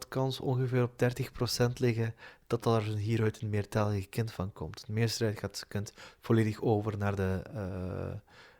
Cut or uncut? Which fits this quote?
uncut